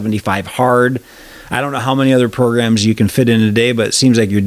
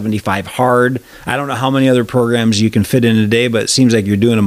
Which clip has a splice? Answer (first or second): second